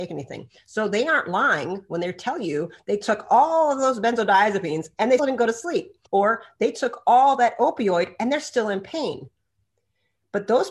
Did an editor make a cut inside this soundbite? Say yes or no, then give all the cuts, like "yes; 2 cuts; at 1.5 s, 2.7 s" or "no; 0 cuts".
yes; 2 cuts; at 5.2 s, 6.1 s